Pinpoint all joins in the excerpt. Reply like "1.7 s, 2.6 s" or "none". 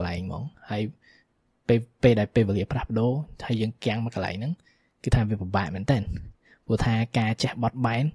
none